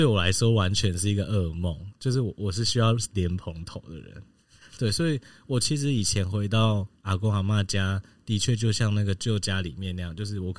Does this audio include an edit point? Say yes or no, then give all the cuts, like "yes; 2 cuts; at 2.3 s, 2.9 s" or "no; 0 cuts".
no; 0 cuts